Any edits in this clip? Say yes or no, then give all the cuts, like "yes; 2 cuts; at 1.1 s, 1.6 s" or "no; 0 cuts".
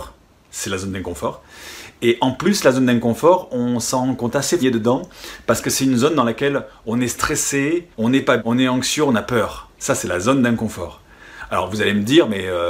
yes; 3 cuts; at 4.6 s, 7.9 s, 8.4 s